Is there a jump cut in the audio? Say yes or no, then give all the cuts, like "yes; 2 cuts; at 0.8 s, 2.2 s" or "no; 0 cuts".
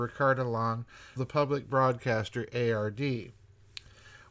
yes; 1 cut; at 1.2 s